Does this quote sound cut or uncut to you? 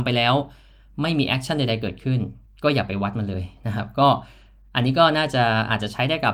cut